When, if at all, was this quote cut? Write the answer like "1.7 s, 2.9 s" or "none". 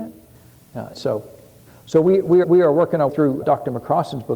0.9 s, 1.7 s, 2.4 s, 3.1 s, 3.4 s